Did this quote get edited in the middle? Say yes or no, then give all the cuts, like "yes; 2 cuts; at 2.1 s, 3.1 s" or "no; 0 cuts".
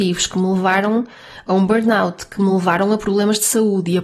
no; 0 cuts